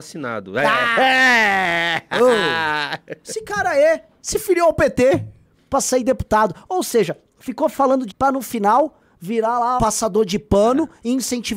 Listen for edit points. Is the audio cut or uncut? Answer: cut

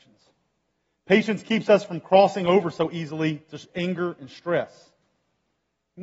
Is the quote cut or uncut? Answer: uncut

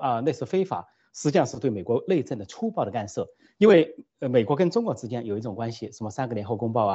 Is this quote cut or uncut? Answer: uncut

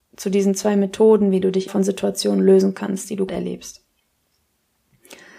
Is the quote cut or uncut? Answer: cut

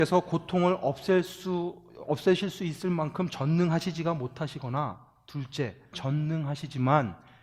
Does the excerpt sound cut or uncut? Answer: cut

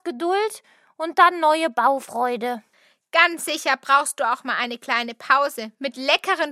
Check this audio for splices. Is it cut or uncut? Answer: uncut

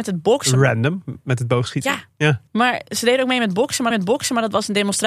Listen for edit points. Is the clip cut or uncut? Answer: cut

